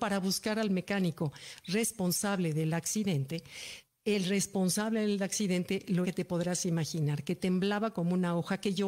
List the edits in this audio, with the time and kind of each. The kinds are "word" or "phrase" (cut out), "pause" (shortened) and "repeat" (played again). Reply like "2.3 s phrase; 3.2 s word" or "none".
6.0 s word